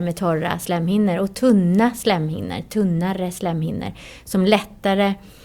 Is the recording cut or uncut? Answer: uncut